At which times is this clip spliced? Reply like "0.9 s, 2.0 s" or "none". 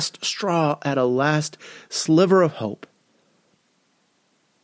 none